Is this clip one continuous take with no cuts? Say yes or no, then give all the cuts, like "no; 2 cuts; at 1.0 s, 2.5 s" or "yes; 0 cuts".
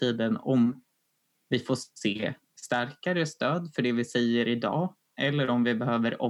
yes; 0 cuts